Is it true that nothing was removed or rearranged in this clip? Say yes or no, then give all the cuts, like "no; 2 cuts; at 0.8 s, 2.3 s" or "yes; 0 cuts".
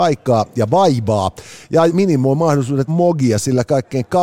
no; 2 cuts; at 1.9 s, 2.9 s